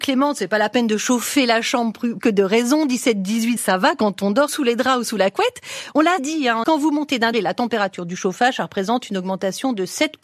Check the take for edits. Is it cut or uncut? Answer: cut